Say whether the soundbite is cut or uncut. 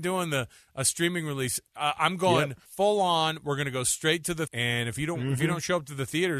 cut